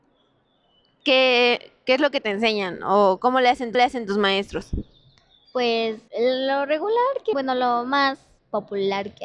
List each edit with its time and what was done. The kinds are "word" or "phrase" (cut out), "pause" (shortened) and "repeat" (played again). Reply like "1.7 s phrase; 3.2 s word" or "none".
3.7 s repeat; 6.1 s pause; 7.3 s word